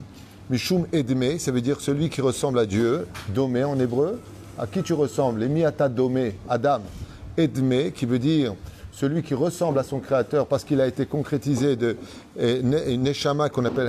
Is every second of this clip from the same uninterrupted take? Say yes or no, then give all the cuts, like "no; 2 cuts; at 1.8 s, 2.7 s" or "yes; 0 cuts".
yes; 0 cuts